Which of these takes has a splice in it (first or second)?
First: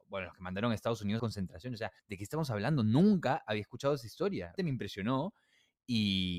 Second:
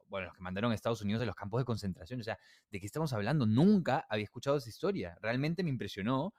first